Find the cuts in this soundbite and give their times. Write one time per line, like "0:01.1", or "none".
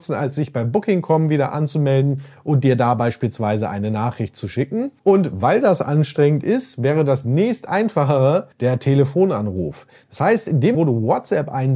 0:05.0
0:08.5
0:10.7